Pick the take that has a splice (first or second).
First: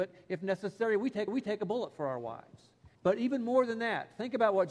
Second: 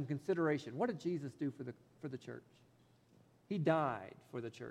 first